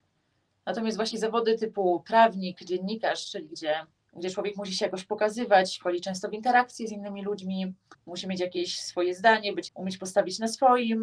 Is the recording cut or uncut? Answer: cut